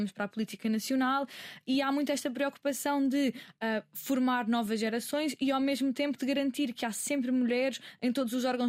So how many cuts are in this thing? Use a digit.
0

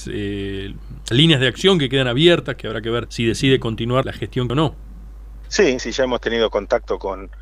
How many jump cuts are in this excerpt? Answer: 5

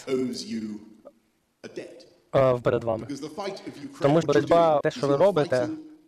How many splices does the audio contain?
3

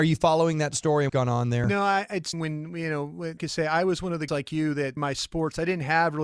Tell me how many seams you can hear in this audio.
5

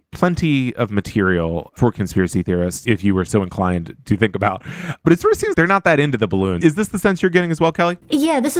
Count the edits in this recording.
1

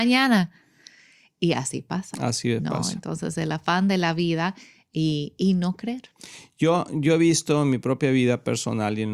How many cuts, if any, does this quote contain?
0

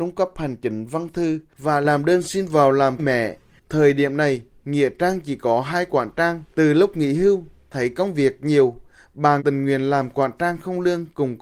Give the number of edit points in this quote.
3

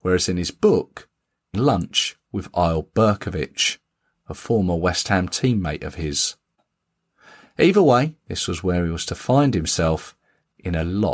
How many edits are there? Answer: 2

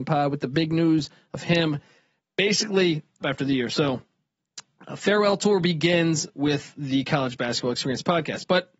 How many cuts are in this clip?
1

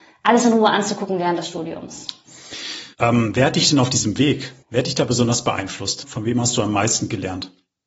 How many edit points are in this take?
2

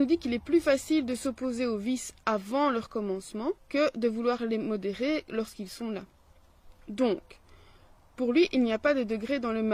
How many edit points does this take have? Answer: 2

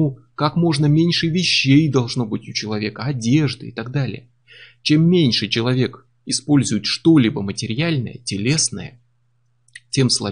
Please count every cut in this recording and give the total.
0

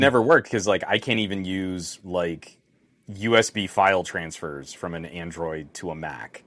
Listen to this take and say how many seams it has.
0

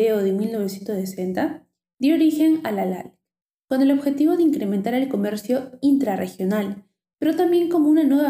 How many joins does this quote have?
0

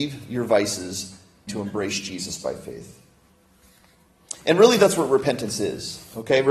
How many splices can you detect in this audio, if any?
1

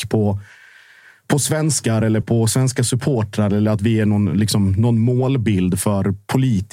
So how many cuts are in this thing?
1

